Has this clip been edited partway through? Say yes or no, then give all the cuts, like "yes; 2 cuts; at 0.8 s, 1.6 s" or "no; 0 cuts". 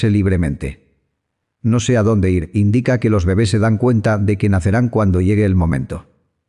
no; 0 cuts